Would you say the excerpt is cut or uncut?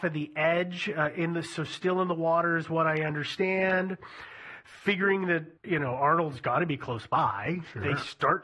cut